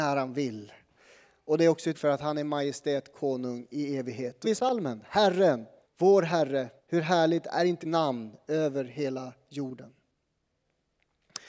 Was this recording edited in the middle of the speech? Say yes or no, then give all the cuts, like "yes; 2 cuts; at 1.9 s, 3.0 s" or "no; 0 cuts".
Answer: yes; 5 cuts; at 1.9 s, 4.4 s, 5.8 s, 6.8 s, 7.8 s